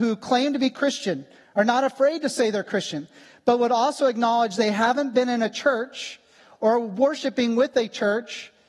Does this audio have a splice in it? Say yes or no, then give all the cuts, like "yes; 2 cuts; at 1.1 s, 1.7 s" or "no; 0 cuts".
no; 0 cuts